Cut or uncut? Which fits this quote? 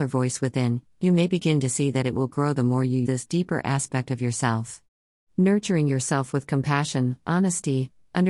cut